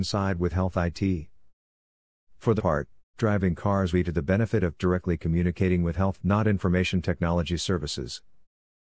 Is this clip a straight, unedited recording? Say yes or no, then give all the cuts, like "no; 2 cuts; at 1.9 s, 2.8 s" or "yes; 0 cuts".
no; 5 cuts; at 2.6 s, 3.2 s, 3.9 s, 4.8 s, 6.2 s